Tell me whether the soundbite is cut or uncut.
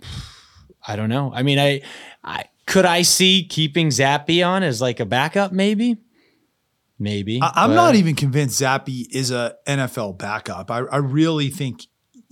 cut